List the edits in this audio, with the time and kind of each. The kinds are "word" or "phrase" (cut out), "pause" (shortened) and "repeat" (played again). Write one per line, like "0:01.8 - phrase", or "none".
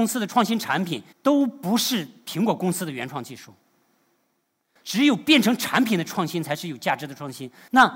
0:01.1 - pause